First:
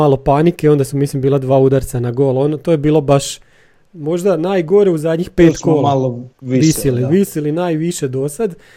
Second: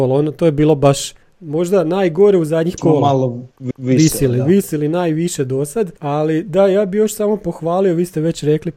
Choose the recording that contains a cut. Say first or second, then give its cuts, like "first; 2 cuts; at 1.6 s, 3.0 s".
second; 4 cuts; at 1.2 s, 2.8 s, 3.7 s, 6.0 s